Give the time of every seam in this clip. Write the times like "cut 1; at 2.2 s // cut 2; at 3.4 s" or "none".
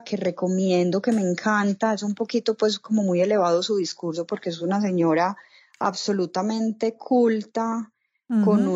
none